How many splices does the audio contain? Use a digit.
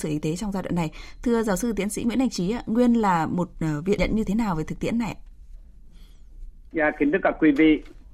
1